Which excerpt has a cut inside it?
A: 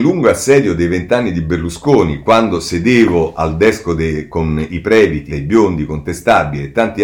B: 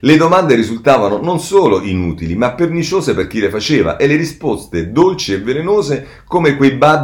A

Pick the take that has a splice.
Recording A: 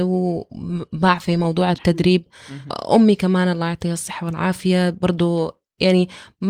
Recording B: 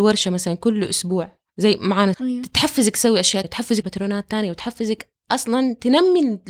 B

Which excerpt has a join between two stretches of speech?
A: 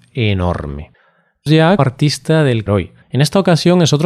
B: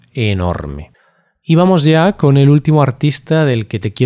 A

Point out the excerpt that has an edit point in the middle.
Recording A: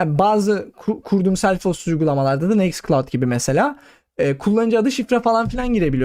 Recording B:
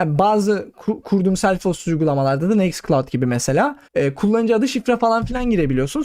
B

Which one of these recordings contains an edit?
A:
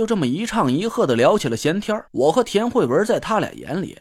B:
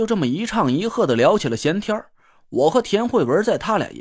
A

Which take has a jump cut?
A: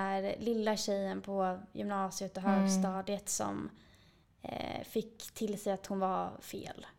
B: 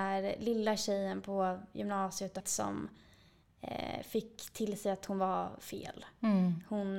B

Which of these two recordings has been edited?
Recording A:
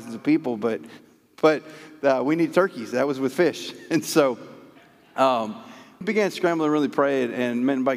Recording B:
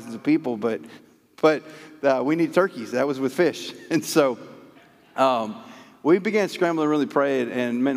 A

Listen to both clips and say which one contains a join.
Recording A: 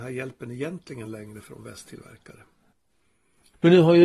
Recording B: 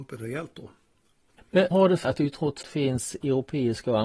B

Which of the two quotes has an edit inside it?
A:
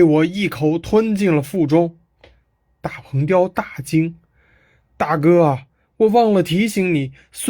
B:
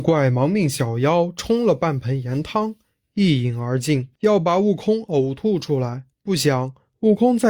B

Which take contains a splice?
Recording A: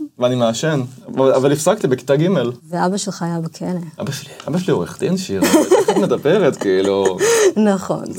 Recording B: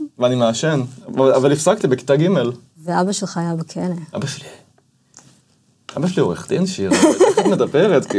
A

